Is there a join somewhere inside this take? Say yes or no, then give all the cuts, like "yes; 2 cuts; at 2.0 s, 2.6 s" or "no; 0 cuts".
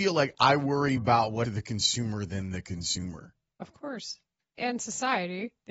yes; 4 cuts; at 1.0 s, 1.4 s, 3.6 s, 4.6 s